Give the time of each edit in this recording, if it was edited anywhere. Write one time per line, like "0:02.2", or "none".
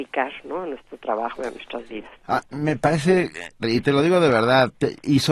0:03.6